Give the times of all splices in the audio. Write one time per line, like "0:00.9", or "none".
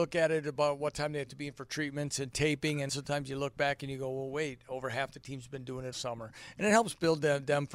0:02.9
0:05.9